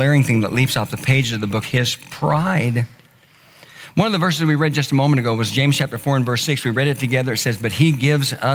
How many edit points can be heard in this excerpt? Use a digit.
1